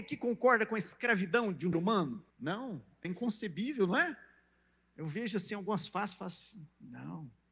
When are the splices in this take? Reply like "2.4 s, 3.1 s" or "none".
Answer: 1.7 s, 2.3 s, 3.0 s